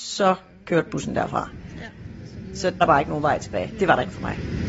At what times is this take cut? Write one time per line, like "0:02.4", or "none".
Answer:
0:02.8